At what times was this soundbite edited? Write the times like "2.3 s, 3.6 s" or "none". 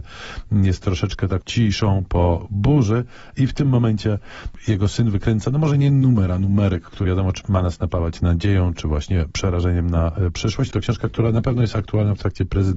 7.0 s, 7.4 s